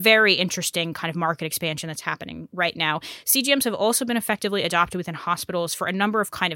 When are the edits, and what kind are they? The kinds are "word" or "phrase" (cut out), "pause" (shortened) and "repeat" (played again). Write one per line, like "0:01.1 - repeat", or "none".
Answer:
0:02.5 - word